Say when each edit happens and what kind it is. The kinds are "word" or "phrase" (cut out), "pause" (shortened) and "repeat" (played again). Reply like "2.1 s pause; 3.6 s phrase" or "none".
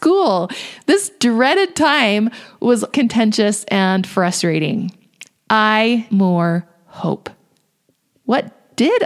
2.9 s word; 6.1 s word